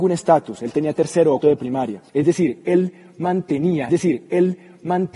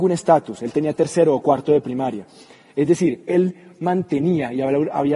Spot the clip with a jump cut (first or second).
first